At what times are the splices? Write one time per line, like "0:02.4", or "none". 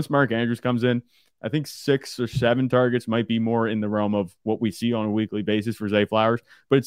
none